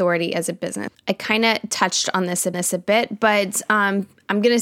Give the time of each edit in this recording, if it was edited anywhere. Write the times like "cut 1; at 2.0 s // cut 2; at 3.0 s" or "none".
cut 1; at 0.9 s // cut 2; at 2.5 s

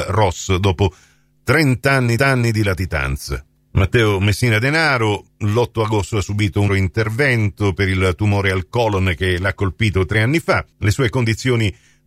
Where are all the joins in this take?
cut 1; at 2.2 s // cut 2; at 6.1 s // cut 3; at 6.7 s // cut 4; at 10.7 s

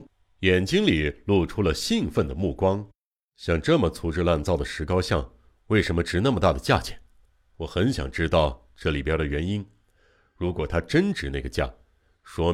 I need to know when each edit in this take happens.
cut 1; at 3.2 s

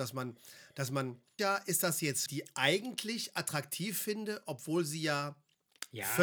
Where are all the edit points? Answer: cut 1; at 1.4 s // cut 2; at 2.3 s

